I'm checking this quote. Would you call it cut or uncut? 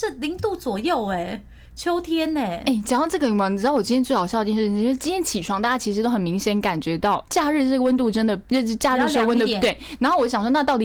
cut